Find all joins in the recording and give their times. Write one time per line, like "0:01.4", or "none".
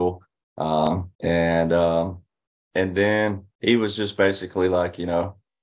0:01.1
0:03.5